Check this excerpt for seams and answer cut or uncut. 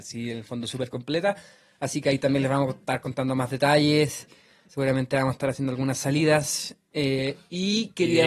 uncut